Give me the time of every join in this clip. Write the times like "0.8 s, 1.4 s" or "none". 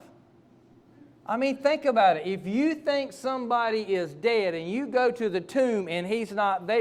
none